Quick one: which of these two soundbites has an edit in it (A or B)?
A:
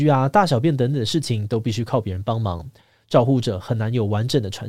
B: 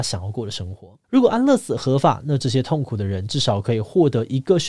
B